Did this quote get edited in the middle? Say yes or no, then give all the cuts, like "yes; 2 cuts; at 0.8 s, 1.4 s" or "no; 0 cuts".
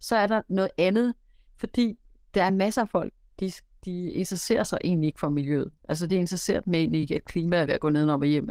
no; 0 cuts